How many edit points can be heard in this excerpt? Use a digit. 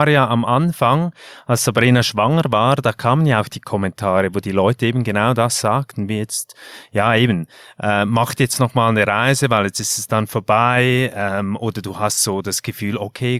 0